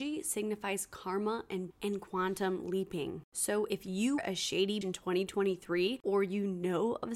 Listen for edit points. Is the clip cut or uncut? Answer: cut